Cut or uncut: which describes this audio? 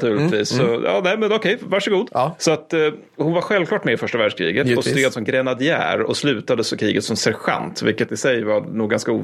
uncut